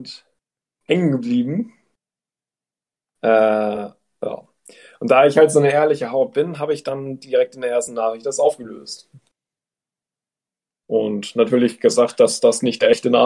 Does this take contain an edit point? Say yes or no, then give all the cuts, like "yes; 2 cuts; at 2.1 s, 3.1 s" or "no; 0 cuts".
no; 0 cuts